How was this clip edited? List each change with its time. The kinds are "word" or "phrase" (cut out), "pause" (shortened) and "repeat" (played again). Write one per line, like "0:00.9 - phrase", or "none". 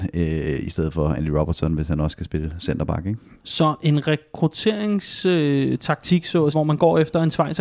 0:06.5 - word